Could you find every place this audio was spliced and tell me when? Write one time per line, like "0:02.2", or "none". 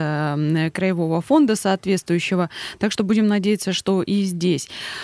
none

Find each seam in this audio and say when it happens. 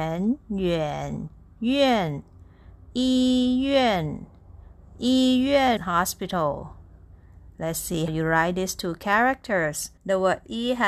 0:05.8
0:08.1
0:10.0

